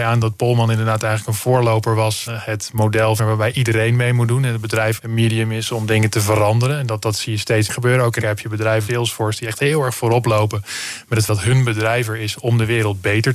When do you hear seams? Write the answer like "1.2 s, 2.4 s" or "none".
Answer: 2.3 s, 3.2 s, 5.0 s, 7.7 s, 8.2 s, 8.9 s, 11.3 s